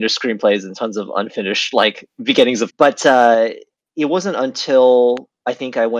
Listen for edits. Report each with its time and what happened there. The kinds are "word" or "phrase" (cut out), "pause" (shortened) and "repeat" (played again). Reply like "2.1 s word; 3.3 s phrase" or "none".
2.7 s phrase